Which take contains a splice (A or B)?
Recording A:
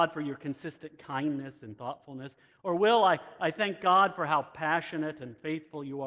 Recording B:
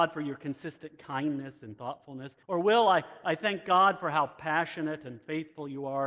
B